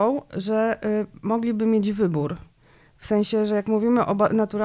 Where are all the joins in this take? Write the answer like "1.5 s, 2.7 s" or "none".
none